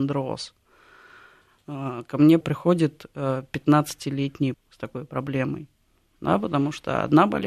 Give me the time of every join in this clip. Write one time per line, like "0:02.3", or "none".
0:02.4
0:04.5